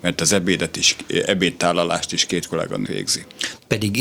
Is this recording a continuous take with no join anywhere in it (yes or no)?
no